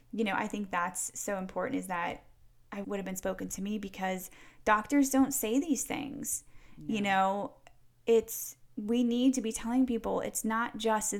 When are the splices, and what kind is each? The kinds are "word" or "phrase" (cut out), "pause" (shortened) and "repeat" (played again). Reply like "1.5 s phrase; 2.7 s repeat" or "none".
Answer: 2.8 s phrase